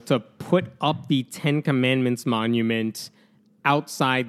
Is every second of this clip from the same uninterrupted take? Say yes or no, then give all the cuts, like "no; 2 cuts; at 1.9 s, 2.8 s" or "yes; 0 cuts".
yes; 0 cuts